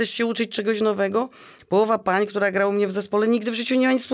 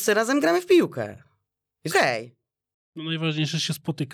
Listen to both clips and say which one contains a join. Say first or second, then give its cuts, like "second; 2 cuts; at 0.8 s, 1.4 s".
second; 1 cut; at 1.9 s